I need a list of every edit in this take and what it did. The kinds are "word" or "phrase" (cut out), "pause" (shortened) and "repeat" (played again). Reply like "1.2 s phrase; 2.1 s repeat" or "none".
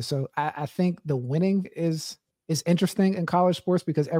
1.6 s word; 2.3 s pause